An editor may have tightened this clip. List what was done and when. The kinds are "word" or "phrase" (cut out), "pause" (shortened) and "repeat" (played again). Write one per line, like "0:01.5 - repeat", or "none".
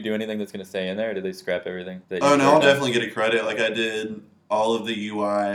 0:02.0 - pause